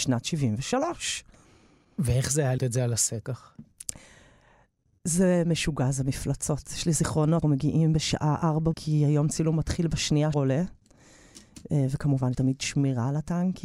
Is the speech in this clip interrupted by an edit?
yes; 6 cuts; at 2.6 s, 3.2 s, 7.4 s, 8.7 s, 10.3 s, 12.3 s

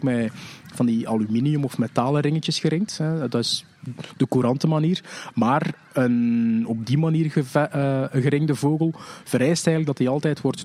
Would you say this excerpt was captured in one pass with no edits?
yes; 0 cuts

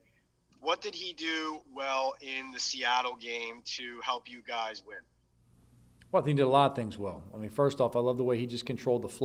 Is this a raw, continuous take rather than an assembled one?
yes; 0 cuts

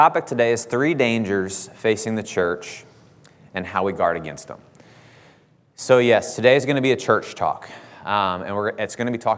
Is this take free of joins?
yes; 0 cuts

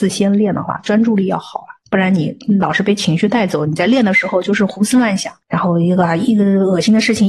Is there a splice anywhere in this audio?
yes; 1 cut; at 5.4 s

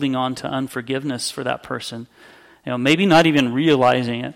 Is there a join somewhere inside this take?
no; 0 cuts

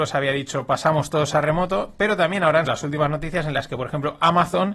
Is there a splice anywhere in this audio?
yes; 1 cut; at 2.7 s

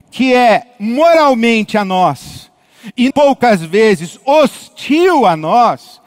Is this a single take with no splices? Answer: no; 2 cuts; at 1.7 s, 3.1 s

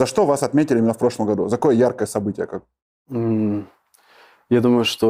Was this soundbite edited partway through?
no; 0 cuts

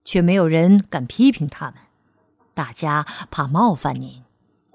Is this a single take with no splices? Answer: yes; 0 cuts

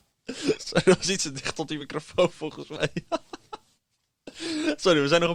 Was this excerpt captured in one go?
yes; 0 cuts

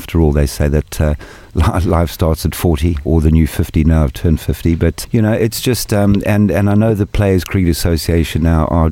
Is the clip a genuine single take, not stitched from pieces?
no; 2 cuts; at 3.1 s, 5.0 s

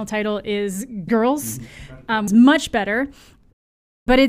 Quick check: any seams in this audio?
yes; 2 cuts; at 1.1 s, 2.3 s

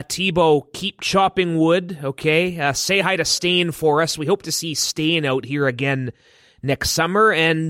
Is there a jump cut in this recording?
no; 0 cuts

